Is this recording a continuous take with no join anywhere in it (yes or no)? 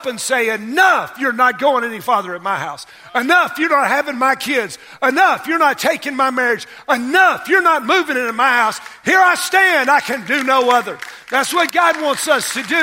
yes